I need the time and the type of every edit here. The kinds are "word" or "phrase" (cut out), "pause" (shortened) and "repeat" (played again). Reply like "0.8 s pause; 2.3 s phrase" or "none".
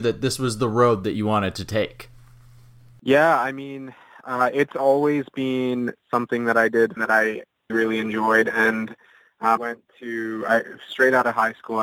7.0 s phrase; 7.7 s word; 9.6 s phrase